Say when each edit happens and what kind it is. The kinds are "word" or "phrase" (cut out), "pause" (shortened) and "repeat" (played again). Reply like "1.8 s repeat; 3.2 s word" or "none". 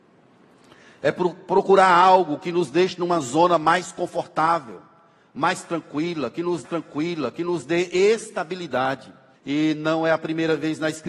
6.6 s repeat; 9.3 s pause